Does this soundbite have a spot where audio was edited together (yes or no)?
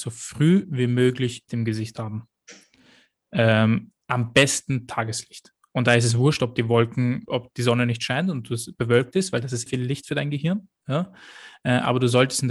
yes